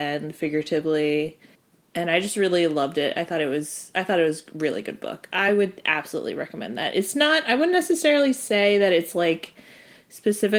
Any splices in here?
no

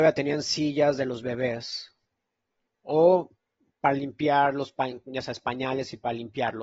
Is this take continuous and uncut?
yes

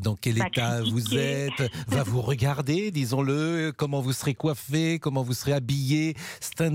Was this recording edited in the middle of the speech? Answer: no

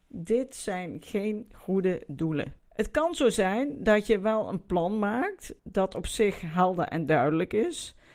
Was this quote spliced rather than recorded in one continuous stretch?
yes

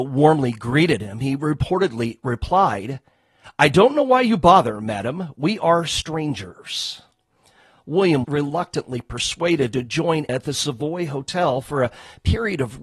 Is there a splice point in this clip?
yes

